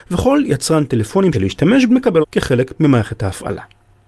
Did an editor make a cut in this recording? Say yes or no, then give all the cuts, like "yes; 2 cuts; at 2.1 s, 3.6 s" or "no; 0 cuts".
yes; 3 cuts; at 1.3 s, 1.9 s, 2.2 s